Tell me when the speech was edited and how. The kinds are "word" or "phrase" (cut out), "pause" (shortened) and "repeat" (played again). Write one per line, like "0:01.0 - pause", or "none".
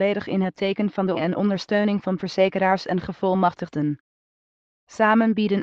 0:01.1 - word
0:02.2 - phrase